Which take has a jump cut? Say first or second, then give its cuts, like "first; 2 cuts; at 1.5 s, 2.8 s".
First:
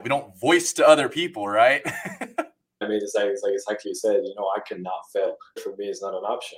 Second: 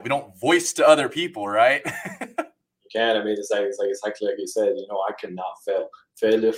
first; 3 cuts; at 2.8 s, 3.8 s, 5.6 s